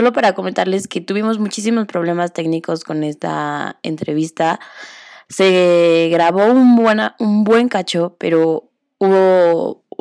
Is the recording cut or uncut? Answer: uncut